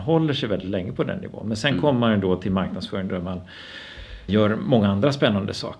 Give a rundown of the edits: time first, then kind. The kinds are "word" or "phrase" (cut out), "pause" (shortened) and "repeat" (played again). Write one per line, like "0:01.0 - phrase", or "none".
0:04.3 - word